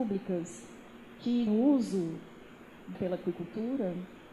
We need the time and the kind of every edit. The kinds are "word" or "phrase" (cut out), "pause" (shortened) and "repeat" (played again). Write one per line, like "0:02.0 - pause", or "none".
0:01.5 - word
0:02.9 - word